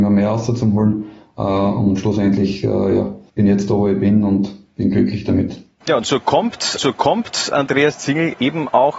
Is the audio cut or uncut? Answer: cut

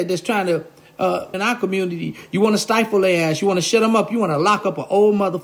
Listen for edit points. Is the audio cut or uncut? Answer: cut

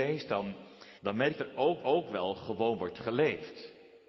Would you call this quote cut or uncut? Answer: cut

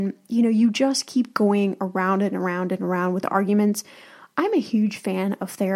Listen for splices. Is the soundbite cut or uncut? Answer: uncut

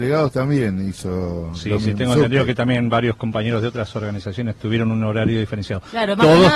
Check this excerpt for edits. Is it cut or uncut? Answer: uncut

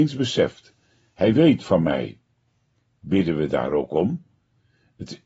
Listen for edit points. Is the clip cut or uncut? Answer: uncut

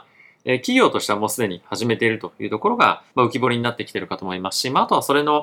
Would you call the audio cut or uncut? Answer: cut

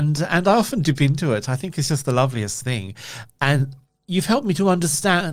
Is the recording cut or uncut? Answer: uncut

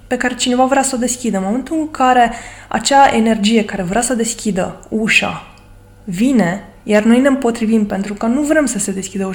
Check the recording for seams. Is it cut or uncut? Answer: uncut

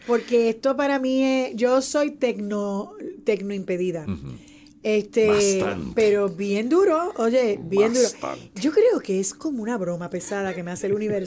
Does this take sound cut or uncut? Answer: uncut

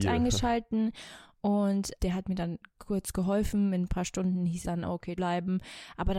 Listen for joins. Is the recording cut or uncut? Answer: cut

